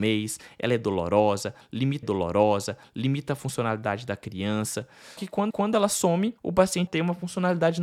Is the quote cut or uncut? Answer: cut